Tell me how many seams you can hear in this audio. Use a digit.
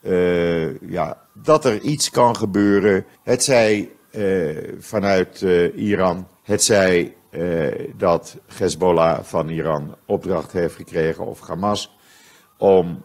3